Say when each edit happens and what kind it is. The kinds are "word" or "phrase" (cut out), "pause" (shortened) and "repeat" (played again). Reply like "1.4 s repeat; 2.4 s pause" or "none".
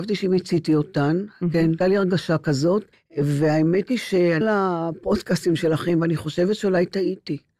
1.8 s word; 2.9 s pause; 4.4 s word